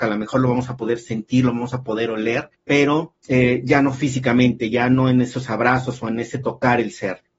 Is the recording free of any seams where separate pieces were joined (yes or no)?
yes